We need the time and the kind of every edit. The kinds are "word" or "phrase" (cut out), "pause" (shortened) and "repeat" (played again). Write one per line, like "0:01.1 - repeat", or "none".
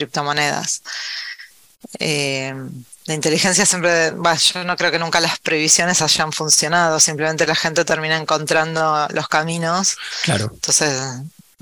none